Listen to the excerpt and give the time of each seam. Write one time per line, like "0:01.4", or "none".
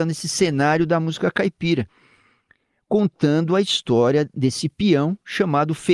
none